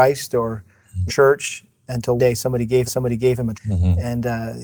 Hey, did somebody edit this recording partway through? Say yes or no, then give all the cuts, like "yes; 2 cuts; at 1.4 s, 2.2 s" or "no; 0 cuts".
yes; 4 cuts; at 1.1 s, 2.2 s, 2.9 s, 3.5 s